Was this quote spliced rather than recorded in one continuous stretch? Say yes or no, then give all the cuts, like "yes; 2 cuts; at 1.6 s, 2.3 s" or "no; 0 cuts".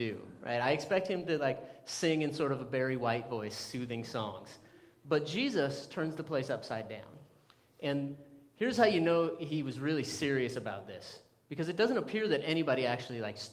no; 0 cuts